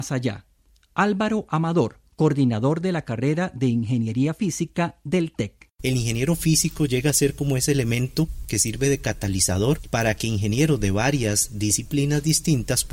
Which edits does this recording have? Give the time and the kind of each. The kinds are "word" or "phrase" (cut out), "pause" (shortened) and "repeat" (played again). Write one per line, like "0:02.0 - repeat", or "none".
0:02.1 - pause